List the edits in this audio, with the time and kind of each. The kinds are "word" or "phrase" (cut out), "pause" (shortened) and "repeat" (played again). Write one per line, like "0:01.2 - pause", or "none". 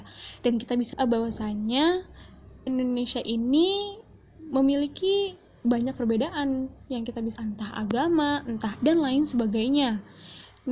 0:00.9 - word
0:02.7 - word
0:06.0 - word
0:07.4 - word
0:08.8 - phrase